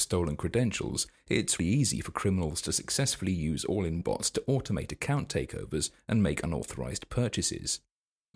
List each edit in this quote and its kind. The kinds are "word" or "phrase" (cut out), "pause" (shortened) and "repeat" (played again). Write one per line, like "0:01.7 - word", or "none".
0:01.6 - word
0:04.0 - word